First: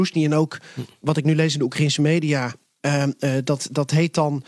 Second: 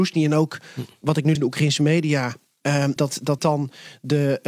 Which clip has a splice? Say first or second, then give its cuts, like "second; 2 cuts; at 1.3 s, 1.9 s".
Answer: second; 3 cuts; at 1.3 s, 3.0 s, 3.4 s